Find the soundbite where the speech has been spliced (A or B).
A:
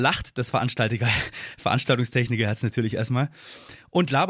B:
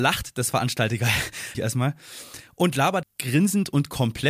B